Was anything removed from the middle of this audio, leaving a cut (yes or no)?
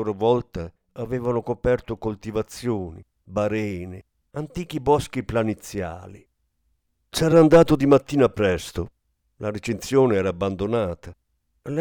no